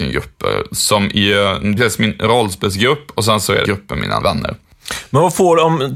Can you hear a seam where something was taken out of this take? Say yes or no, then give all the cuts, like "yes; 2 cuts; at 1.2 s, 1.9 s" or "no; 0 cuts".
yes; 3 cuts; at 1.8 s, 3.6 s, 4.2 s